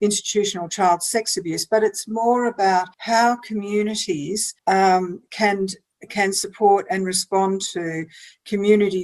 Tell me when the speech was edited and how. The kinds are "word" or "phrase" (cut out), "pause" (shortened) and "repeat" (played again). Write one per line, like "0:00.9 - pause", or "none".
0:02.9 - pause
0:04.6 - pause